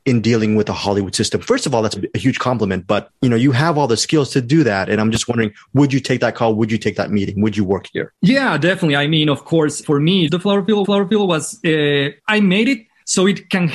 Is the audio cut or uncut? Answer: cut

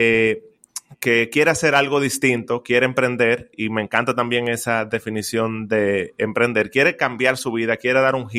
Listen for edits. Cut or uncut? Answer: uncut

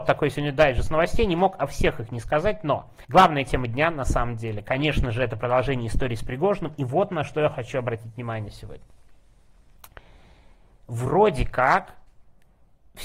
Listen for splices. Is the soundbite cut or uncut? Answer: cut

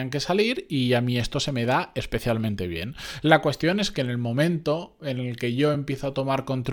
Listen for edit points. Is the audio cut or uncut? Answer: uncut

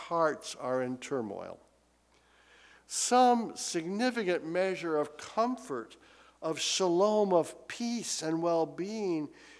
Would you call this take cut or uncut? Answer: uncut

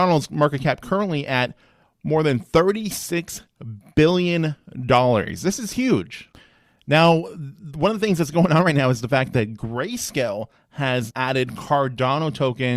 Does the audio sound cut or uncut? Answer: cut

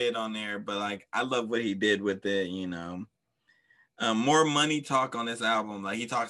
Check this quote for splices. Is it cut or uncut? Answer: uncut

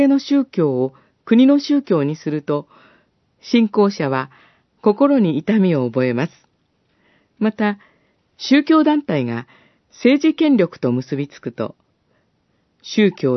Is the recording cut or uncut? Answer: uncut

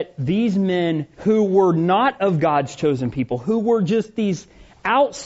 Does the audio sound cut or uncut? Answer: cut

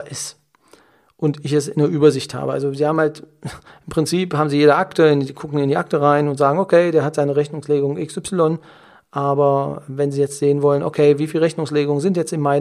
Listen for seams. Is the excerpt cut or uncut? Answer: uncut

